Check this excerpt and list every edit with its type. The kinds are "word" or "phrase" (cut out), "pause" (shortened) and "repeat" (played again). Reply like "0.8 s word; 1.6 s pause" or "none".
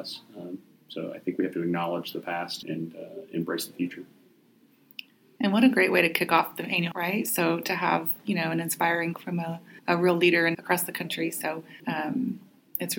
2.6 s word; 6.9 s word; 9.1 s word; 9.8 s pause; 10.5 s word; 11.8 s pause